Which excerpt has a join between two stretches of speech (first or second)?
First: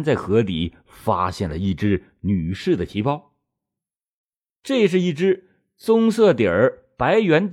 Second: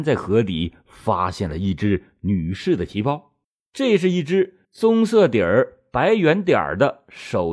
second